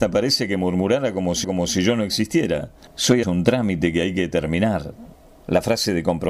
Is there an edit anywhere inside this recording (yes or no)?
yes